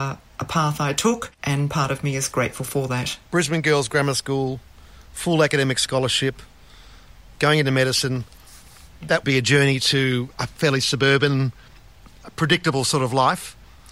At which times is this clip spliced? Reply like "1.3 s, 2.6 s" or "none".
1.3 s, 3.2 s, 9.2 s, 10.3 s